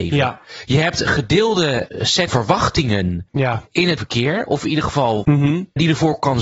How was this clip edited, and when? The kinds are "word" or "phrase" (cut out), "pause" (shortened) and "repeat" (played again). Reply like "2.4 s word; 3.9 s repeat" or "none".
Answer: 1.1 s word; 2.3 s word; 4.0 s word; 5.2 s word